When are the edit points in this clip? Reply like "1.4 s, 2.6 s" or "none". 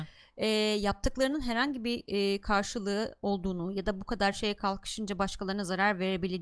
none